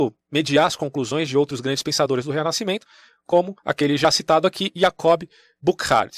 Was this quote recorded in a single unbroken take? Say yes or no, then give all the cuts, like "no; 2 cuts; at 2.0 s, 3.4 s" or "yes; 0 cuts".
no; 1 cut; at 3.6 s